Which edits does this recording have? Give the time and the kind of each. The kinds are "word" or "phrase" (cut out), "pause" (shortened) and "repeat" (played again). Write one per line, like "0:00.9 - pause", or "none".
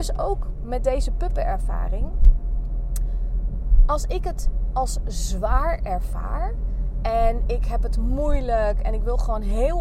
none